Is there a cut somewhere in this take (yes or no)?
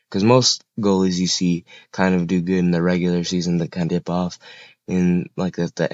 yes